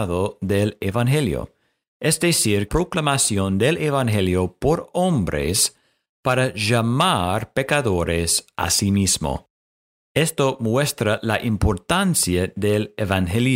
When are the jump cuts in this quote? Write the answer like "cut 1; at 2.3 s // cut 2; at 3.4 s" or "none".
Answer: cut 1; at 2.7 s

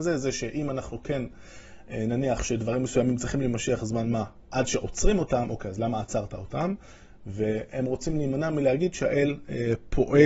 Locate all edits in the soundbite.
none

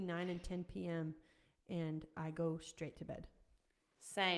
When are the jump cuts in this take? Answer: none

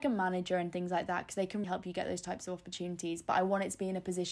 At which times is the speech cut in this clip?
cut 1; at 1.6 s

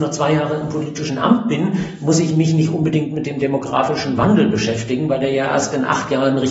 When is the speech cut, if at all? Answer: none

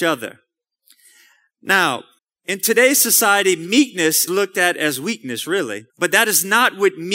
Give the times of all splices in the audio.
cut 1; at 2.2 s // cut 2; at 4.3 s // cut 3; at 5.9 s

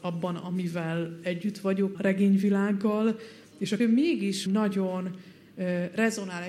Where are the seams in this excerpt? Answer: cut 1; at 1.9 s // cut 2; at 3.8 s // cut 3; at 4.5 s

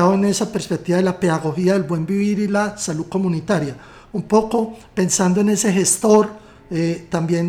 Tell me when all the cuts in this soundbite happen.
none

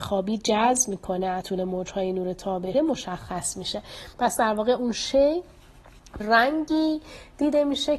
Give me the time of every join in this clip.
cut 1; at 1.4 s // cut 2; at 2.7 s // cut 3; at 4.1 s // cut 4; at 6.2 s

